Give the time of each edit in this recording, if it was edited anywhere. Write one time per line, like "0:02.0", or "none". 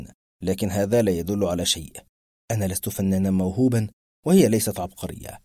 none